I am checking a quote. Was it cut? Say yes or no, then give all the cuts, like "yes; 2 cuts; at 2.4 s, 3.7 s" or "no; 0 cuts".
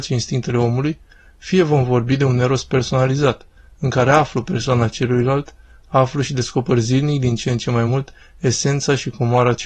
no; 0 cuts